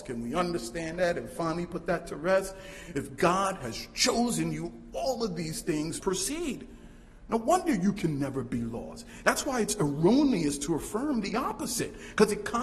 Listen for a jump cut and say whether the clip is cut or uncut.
cut